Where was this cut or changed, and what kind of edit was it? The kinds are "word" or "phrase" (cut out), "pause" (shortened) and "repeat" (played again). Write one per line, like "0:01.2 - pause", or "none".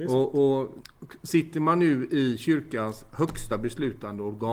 none